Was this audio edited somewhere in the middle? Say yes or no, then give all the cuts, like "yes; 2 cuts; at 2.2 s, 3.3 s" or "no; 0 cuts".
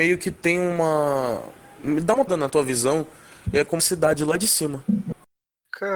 yes; 2 cuts; at 2.3 s, 3.8 s